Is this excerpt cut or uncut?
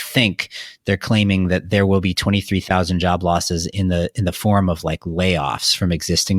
uncut